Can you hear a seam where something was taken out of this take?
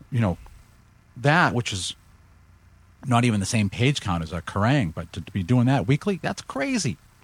no; 0 cuts

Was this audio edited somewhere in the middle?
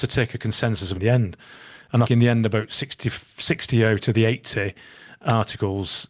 yes; 2 cuts; at 0.9 s, 2.0 s

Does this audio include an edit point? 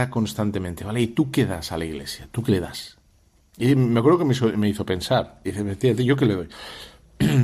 no; 0 cuts

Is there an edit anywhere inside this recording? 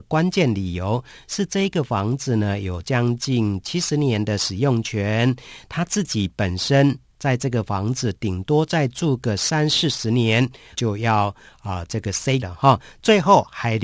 yes; 2 cuts; at 10.7 s, 12.4 s

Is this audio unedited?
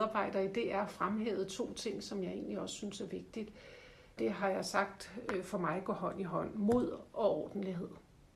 yes; 0 cuts

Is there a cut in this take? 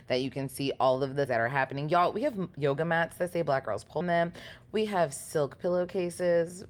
yes; 2 cuts; at 1.3 s, 4.0 s

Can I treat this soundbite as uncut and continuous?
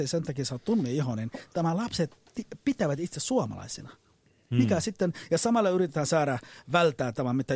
yes; 0 cuts

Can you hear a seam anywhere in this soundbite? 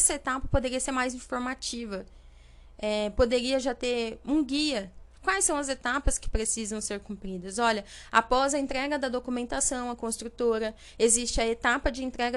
no; 0 cuts

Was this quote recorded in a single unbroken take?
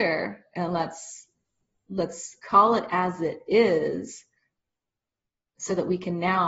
yes; 0 cuts

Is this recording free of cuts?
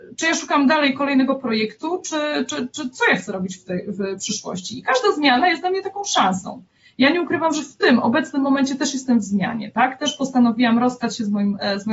yes; 0 cuts

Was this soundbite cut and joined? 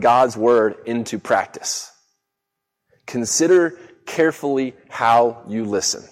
no; 0 cuts

